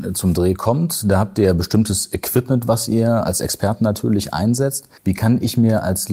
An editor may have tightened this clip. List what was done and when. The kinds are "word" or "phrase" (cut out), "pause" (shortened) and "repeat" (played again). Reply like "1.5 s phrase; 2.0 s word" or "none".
5.0 s pause